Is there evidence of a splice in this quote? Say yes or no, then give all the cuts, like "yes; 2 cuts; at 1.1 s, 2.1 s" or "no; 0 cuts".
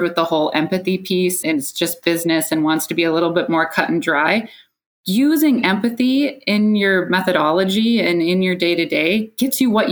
yes; 1 cut; at 1.4 s